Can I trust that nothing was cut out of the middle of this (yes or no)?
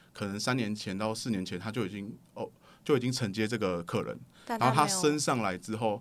yes